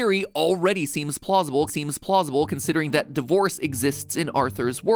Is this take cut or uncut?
cut